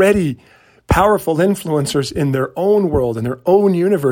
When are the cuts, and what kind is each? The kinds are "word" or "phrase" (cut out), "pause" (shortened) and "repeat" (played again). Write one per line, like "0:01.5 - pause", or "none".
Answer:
none